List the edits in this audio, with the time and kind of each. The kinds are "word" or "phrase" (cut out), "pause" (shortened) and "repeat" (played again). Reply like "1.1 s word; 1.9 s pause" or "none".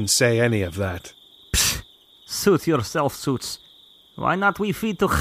none